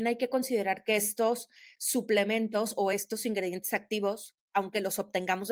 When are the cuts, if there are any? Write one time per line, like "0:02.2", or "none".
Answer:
none

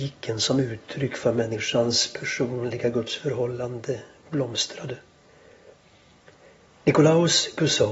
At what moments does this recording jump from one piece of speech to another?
none

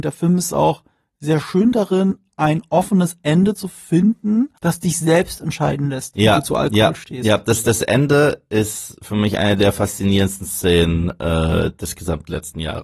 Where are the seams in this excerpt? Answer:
0:04.6

